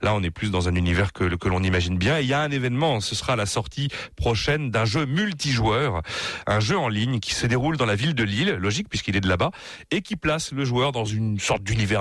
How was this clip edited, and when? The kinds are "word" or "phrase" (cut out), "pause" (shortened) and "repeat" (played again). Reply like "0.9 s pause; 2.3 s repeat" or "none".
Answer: none